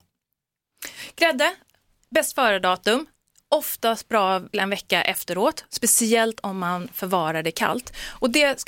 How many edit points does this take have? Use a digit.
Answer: 1